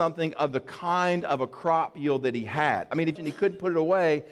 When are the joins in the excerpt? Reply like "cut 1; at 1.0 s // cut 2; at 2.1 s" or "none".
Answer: cut 1; at 3.2 s